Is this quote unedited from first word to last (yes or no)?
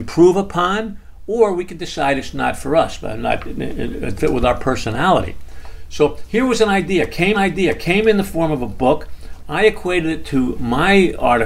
no